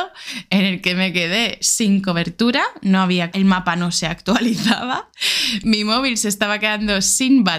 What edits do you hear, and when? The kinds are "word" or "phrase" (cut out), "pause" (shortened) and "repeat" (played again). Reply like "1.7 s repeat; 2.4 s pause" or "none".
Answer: 3.3 s word